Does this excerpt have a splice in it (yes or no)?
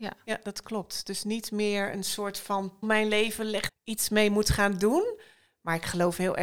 yes